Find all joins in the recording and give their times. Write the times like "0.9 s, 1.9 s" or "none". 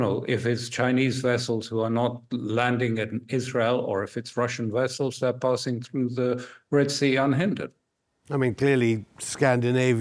none